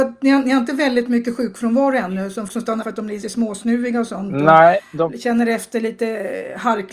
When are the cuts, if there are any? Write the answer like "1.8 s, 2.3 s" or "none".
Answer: 2.5 s, 2.8 s, 3.2 s

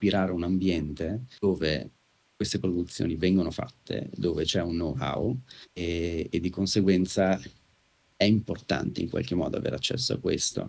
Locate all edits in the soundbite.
1.4 s, 5.7 s

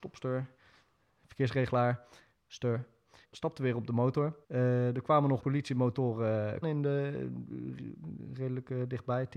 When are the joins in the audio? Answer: 3.2 s, 4.4 s, 5.4 s, 6.6 s

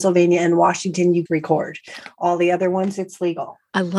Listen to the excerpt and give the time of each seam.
1.3 s

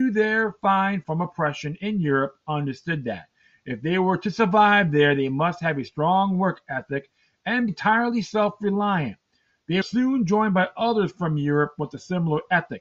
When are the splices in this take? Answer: 1.0 s, 7.7 s, 9.8 s

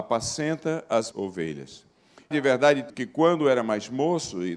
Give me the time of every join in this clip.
1.1 s, 2.3 s, 2.9 s

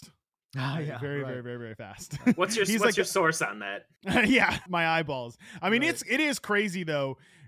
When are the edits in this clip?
4.7 s

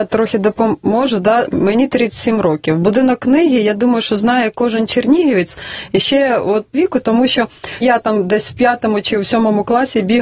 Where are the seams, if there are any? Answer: 1.4 s, 6.7 s, 7.8 s

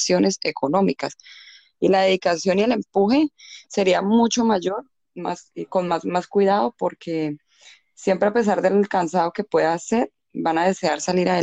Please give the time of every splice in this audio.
none

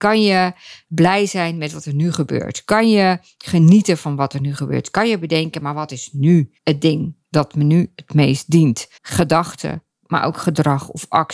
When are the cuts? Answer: 6.6 s, 9.0 s

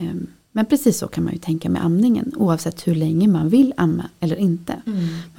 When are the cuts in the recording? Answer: none

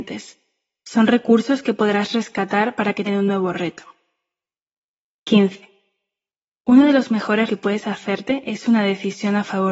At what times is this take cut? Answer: 3.1 s, 7.5 s

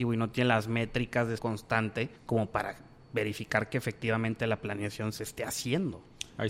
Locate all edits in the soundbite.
1.4 s, 2.2 s

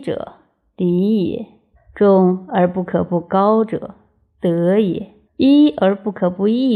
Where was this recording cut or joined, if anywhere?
1.8 s, 5.2 s

